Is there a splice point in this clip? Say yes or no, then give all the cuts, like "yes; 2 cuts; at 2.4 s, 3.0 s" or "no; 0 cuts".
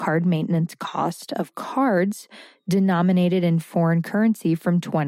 no; 0 cuts